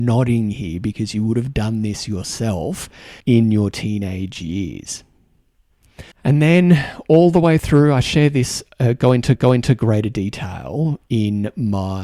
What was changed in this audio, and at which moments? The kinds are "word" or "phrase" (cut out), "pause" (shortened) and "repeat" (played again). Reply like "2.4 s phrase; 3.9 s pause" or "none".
3.2 s pause; 6.1 s pause; 9.4 s repeat